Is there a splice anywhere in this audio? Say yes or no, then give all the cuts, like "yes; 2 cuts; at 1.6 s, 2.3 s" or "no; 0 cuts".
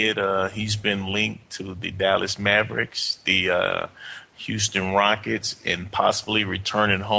no; 0 cuts